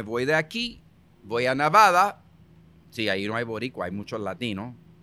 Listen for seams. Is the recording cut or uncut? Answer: uncut